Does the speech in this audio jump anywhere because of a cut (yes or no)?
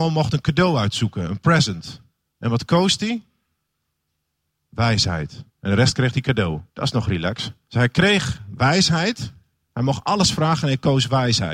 yes